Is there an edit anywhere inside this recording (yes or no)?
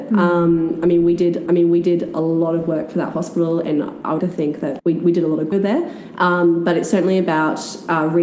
yes